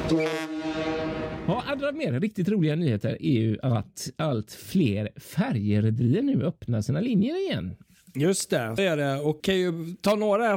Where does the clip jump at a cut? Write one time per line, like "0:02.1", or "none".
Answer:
0:08.8
0:09.4